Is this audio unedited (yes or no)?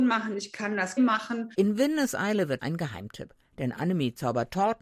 no